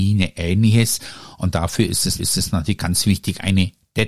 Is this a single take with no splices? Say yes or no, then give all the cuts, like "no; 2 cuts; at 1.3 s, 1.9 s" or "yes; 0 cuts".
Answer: no; 1 cut; at 2.2 s